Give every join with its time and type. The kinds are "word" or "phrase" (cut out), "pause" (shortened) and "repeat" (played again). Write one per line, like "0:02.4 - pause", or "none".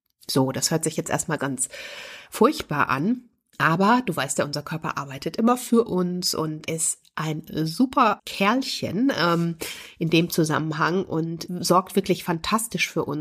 0:01.4 - word
0:06.7 - word
0:08.2 - word

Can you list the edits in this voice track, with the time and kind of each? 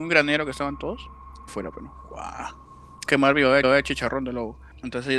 0:01.5 - phrase
0:03.1 - phrase
0:03.6 - repeat

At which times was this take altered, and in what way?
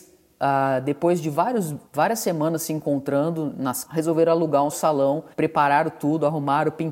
0:01.9 - pause
0:03.8 - word
0:04.7 - phrase
0:05.3 - pause

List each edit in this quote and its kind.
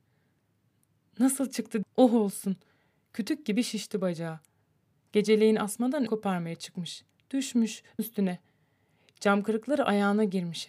0:01.8 - word
0:06.1 - word
0:08.0 - phrase

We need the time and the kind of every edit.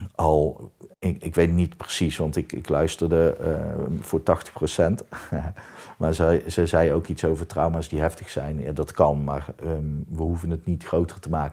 0:00.9 - pause

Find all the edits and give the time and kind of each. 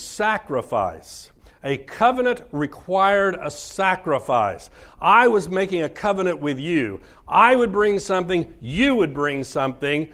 none

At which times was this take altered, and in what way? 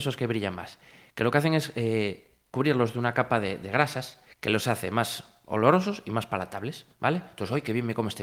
0:04.3 - pause
0:06.9 - pause

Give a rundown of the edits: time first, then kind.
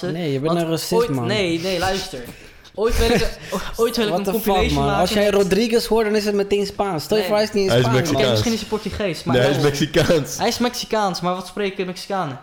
none

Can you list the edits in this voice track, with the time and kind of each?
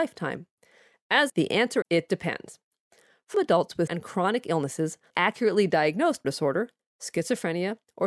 0:01.3 - word
0:01.8 - word
0:03.3 - word
0:03.9 - word
0:05.1 - word
0:06.2 - word

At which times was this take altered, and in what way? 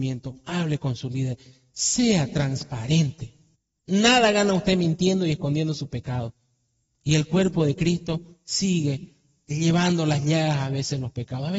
0:03.5 - pause

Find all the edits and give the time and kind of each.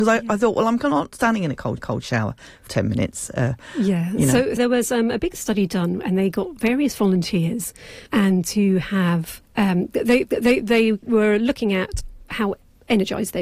0:01.8 - repeat
0:02.7 - phrase
0:04.6 - word
0:08.1 - pause
0:09.5 - pause
0:10.2 - repeat

